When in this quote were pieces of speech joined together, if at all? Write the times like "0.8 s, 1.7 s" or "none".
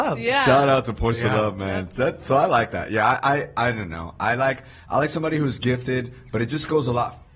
none